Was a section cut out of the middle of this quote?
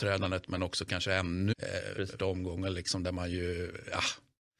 yes; 2 cuts; at 1.5 s, 2.2 s

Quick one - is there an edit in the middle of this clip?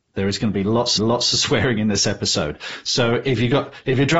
yes; 1 cut; at 1.0 s

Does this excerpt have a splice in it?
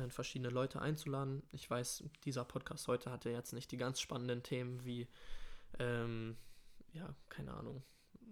no; 0 cuts

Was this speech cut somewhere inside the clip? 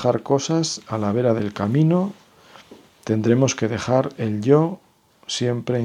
no; 0 cuts

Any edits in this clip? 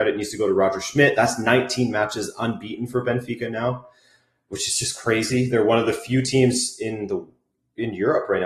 no; 0 cuts

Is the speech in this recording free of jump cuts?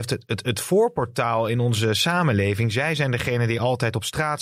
yes; 0 cuts

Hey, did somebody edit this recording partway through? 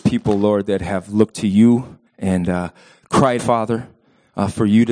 yes; 3 cuts; at 1.3 s, 2.1 s, 3.4 s

